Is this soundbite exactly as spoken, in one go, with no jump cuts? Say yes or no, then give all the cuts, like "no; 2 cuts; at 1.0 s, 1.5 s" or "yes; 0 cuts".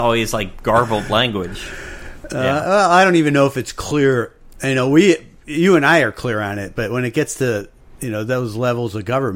yes; 0 cuts